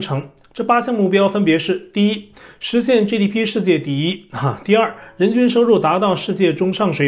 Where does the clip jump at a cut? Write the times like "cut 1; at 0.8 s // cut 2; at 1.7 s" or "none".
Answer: none